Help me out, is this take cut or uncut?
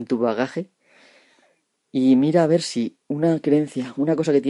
uncut